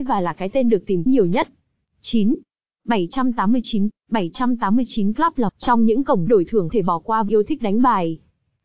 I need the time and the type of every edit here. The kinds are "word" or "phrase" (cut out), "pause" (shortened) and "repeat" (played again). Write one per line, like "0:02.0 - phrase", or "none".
0:01.1 - word
0:03.9 - word
0:05.5 - word
0:06.3 - word
0:06.7 - word
0:07.3 - word